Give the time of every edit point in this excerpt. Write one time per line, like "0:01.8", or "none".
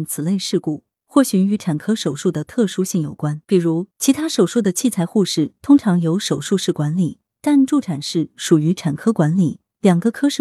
0:03.4
0:03.9